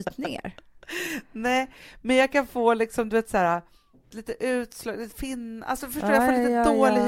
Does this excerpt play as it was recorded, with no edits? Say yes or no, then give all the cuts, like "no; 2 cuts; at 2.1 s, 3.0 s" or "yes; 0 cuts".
no; 1 cut; at 5.1 s